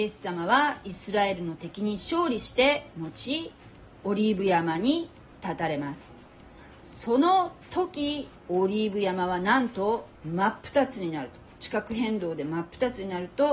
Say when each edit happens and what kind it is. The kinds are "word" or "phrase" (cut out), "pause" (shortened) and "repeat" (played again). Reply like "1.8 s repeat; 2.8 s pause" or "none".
8.4 s pause; 10.2 s pause